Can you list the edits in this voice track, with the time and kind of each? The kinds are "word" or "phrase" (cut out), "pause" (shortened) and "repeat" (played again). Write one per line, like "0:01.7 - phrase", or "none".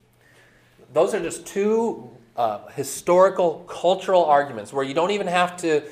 none